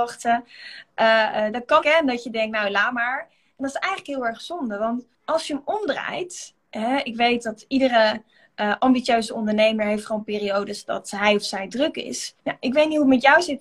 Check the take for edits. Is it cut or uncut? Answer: cut